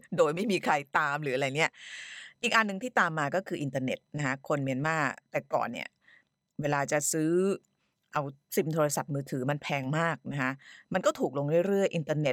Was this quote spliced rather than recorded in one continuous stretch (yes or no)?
no